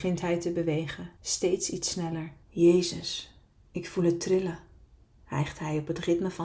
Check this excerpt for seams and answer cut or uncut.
cut